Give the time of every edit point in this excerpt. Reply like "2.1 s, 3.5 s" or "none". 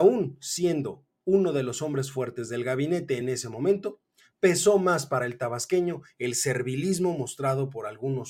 none